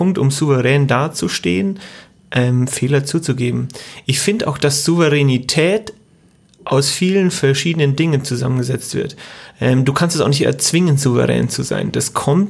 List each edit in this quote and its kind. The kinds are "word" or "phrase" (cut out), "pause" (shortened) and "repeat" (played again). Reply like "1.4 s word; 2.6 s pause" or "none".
none